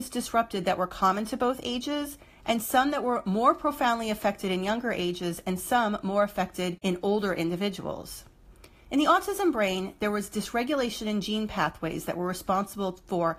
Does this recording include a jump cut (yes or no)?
no